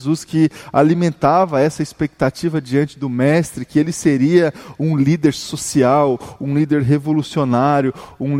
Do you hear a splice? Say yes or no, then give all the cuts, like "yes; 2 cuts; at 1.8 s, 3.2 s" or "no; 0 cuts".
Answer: no; 0 cuts